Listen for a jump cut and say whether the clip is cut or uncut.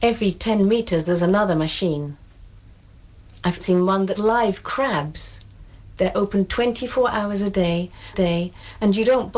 cut